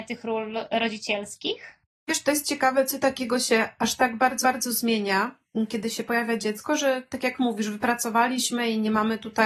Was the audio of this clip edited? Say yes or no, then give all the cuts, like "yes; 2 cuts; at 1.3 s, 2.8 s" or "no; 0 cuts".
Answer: yes; 2 cuts; at 2.1 s, 4.4 s